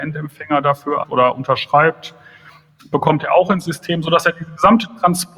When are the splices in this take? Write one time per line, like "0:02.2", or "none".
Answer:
0:01.0